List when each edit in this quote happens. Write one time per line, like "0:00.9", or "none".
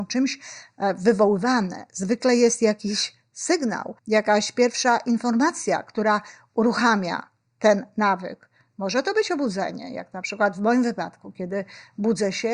0:04.0